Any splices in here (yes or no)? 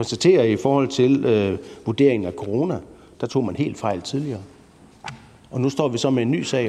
no